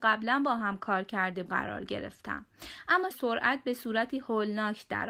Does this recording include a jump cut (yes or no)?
yes